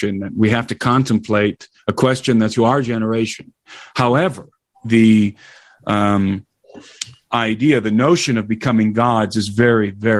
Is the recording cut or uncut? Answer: cut